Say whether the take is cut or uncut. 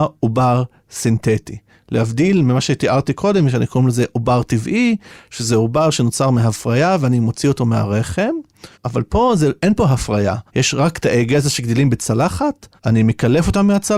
cut